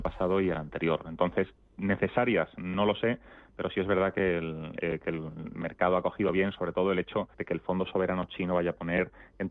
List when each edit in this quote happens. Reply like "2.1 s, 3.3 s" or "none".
7.3 s